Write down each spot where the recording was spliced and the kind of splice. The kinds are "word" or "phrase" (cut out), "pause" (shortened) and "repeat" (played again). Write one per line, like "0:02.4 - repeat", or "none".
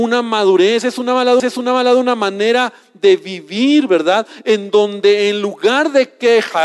0:01.4 - repeat